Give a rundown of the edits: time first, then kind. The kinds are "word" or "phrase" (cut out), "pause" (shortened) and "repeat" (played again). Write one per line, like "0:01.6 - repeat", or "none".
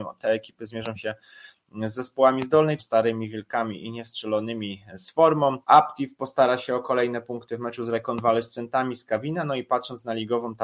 0:02.8 - phrase
0:05.6 - pause